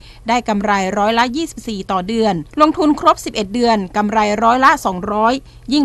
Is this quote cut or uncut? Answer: cut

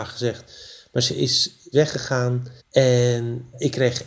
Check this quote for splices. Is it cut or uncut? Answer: cut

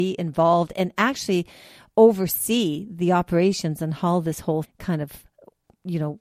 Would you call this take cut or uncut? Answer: cut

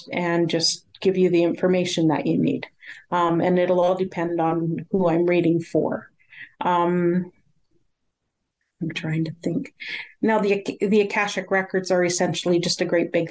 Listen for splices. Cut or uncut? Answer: uncut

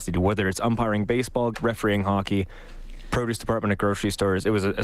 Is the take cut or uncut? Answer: cut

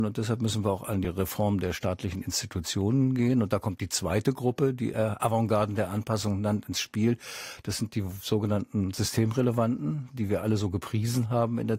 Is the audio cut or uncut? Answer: uncut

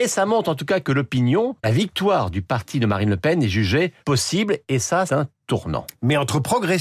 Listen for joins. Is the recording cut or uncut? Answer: cut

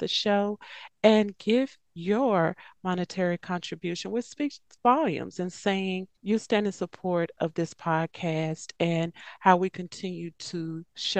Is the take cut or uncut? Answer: cut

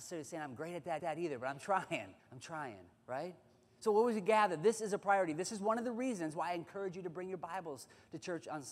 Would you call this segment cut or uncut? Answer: cut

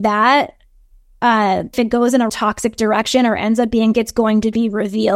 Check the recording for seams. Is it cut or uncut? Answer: cut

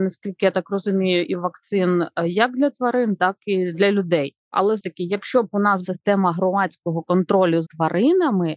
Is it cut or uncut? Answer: cut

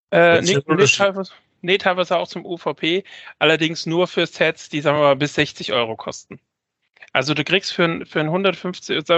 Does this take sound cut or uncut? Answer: uncut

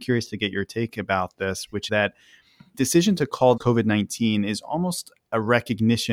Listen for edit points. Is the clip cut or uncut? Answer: cut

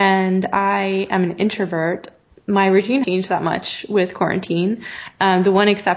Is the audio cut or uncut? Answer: cut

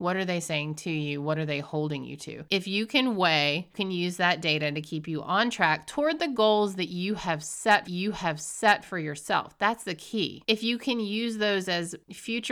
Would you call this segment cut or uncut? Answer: cut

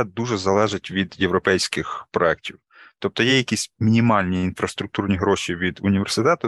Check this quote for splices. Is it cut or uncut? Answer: uncut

